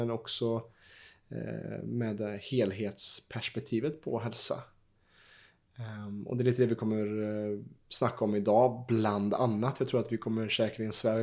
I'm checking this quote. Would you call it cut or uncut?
uncut